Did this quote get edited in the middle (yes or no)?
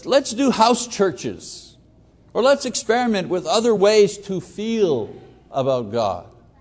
no